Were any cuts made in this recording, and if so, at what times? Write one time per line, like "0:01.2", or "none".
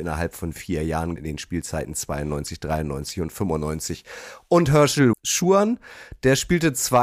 0:01.2
0:05.1

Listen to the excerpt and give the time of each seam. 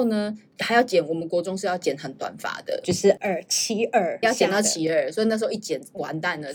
0:04.2

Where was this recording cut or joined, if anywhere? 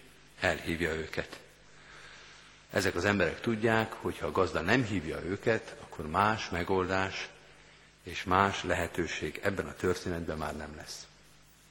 none

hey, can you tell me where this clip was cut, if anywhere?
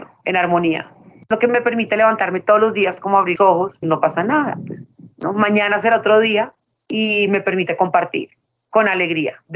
0:01.3
0:03.4
0:03.8

